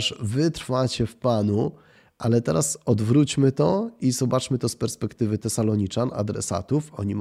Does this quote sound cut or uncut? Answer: uncut